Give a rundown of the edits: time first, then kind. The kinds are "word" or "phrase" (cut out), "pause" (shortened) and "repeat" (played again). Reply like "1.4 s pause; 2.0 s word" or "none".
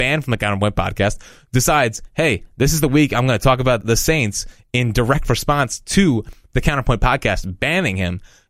3.8 s word